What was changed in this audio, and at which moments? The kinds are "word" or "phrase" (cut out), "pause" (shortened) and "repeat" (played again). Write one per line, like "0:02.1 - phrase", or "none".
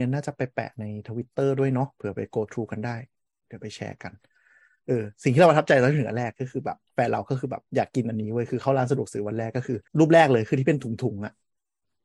0:06.9 - pause
0:07.7 - pause
0:09.9 - pause

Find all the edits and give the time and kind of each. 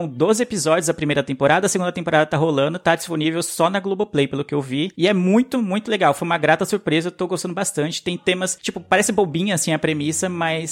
none

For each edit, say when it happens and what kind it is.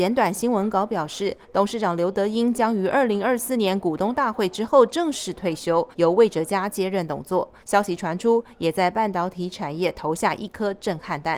0:05.9 - pause
0:07.6 - pause

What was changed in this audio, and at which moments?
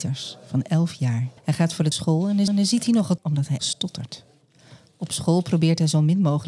0:01.4 - pause
0:01.9 - phrase
0:02.5 - repeat
0:03.2 - word
0:03.6 - word

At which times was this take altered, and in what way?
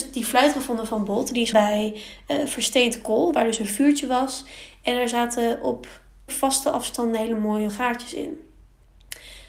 0:01.5 - word
0:06.3 - word
0:07.7 - word

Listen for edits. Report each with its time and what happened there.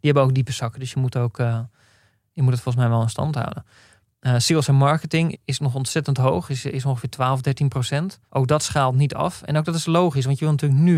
0:05.3 - word
0:08.3 - pause

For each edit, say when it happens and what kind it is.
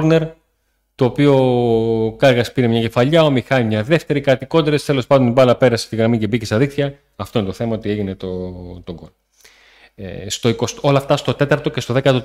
none

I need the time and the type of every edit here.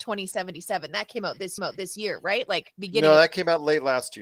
0:01.6 - repeat

